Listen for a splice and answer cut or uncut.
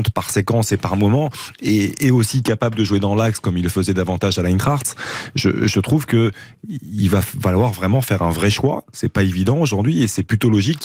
uncut